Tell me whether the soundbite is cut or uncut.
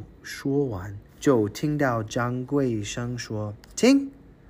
cut